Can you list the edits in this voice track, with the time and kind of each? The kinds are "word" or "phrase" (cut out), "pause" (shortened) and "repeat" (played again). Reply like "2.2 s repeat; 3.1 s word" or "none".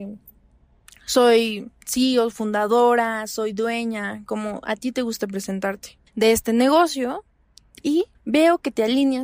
1.8 s pause; 6.1 s pause; 8.1 s pause